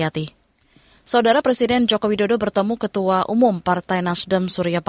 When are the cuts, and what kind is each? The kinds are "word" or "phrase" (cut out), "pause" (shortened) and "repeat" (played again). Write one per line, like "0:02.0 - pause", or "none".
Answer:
none